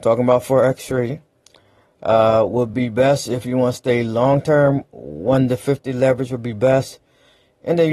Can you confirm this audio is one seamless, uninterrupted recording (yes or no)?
yes